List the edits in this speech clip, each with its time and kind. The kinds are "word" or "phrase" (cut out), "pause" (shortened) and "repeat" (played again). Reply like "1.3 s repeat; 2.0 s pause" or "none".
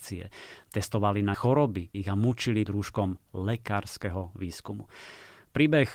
1.3 s phrase; 1.9 s word; 2.7 s word